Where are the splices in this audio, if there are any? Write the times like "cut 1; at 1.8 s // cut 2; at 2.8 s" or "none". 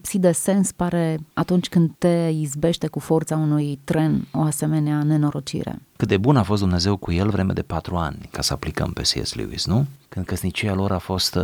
none